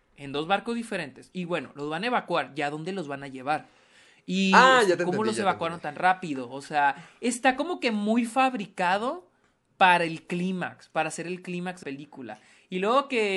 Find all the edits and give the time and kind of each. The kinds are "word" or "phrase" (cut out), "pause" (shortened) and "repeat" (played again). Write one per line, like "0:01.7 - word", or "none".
0:11.8 - word